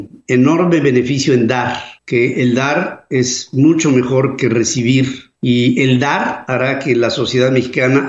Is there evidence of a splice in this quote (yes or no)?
yes